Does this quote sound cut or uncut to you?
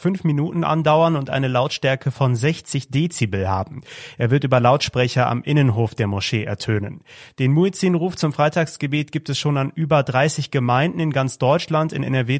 uncut